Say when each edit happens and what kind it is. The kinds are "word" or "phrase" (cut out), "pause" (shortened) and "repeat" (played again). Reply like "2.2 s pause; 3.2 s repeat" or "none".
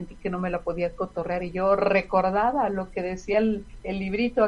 none